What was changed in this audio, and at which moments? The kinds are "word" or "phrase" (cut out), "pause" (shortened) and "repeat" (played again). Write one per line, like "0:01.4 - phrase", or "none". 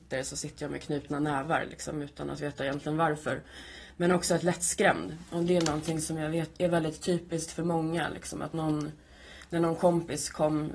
0:04.4 - phrase
0:06.6 - word
0:08.5 - word